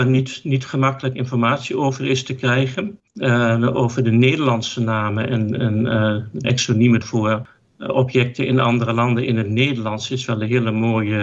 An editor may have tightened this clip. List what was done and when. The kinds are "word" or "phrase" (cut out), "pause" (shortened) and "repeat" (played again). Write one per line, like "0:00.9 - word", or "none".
0:03.1 - pause
0:06.4 - phrase
0:07.0 - phrase